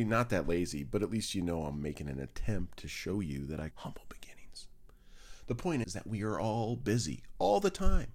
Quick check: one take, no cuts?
no; 2 cuts; at 3.7 s, 5.8 s

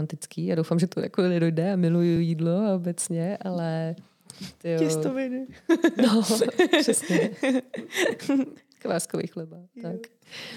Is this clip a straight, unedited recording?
yes; 0 cuts

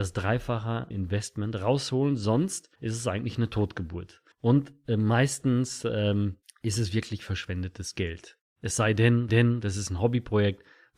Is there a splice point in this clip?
yes; 5 cuts; at 0.9 s, 2.7 s, 4.3 s, 6.4 s, 9.3 s

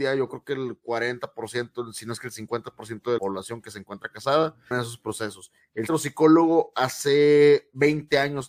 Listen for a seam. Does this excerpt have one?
yes; 3 cuts; at 3.2 s, 4.7 s, 5.9 s

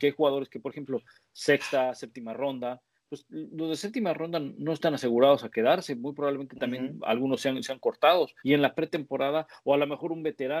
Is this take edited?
yes; 1 cut; at 8.4 s

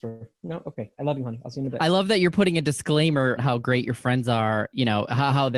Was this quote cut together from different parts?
yes; 1 cut; at 3.4 s

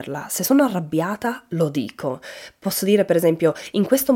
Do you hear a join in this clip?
no; 0 cuts

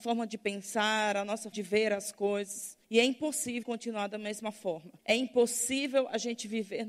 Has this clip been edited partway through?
yes; 4 cuts; at 1.5 s, 2.8 s, 3.6 s, 5.0 s

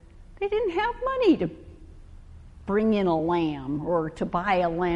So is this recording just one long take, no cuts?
yes; 0 cuts

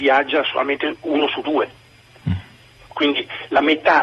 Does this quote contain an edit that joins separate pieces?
no; 0 cuts

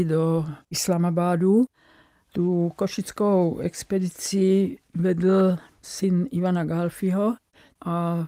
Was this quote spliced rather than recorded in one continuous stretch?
no; 0 cuts

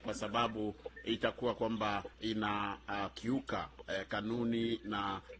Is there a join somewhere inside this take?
yes; 1 cut; at 2.1 s

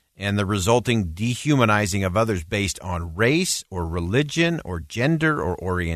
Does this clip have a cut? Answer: no; 0 cuts

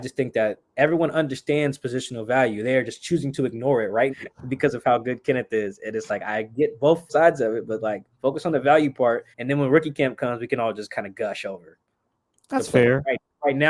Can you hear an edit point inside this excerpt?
yes; 4 cuts; at 4.1 s, 7.1 s, 8.1 s, 9.3 s

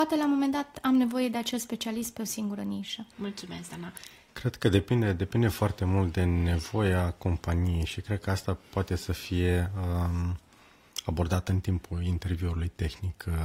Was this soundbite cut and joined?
no; 0 cuts

